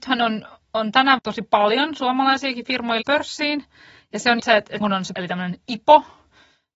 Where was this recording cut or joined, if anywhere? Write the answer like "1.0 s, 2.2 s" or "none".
1.2 s, 3.0 s, 4.4 s, 4.8 s, 5.1 s

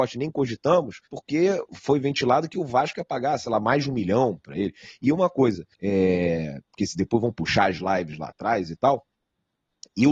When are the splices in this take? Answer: 1.1 s, 5.7 s

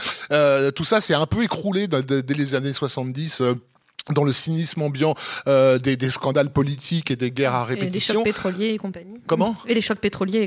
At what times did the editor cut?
none

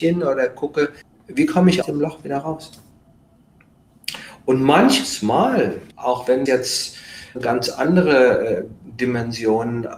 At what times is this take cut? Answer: 1.0 s, 1.8 s, 5.9 s, 6.5 s, 7.3 s

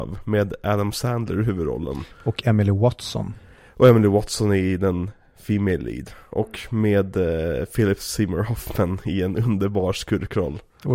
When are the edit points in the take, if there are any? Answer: none

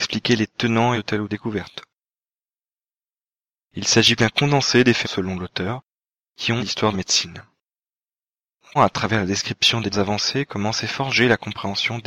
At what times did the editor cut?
0.9 s, 1.3 s, 4.2 s, 5.0 s, 6.6 s, 6.9 s, 8.8 s, 9.9 s

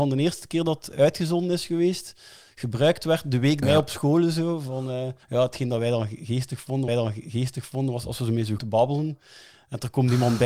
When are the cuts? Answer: 3.6 s, 5.2 s, 6.9 s, 8.6 s

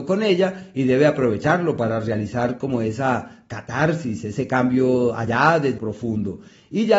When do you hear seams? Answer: 5.8 s

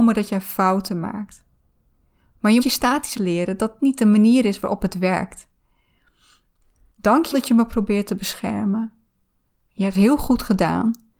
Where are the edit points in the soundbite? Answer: 2.6 s, 3.1 s, 3.8 s, 7.3 s, 9.9 s

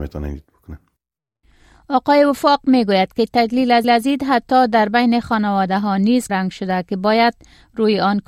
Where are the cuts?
3.8 s, 6.3 s

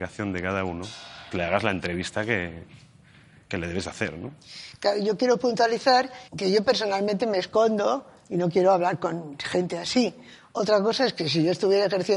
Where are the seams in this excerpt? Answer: 1.3 s, 6.3 s

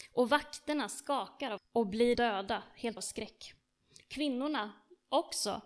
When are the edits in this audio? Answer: 1.6 s, 2.1 s, 3.0 s

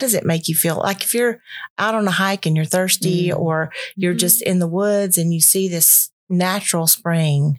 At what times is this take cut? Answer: 6.2 s

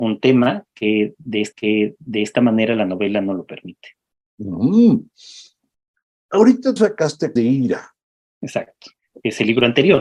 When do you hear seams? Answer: 1.5 s, 6.8 s, 7.4 s

